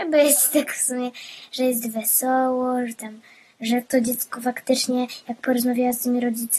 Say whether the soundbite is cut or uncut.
uncut